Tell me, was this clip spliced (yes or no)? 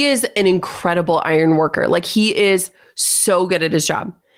no